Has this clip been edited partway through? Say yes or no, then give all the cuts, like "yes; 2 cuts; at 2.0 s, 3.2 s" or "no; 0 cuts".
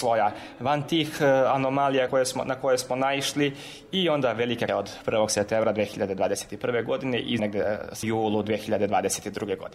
yes; 4 cuts; at 2.1 s, 4.7 s, 7.4 s, 8.0 s